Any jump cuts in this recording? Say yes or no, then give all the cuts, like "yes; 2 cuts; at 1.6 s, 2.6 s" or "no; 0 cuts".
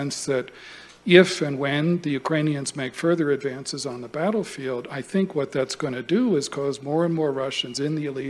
no; 0 cuts